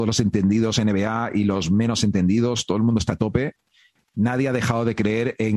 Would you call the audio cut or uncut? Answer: cut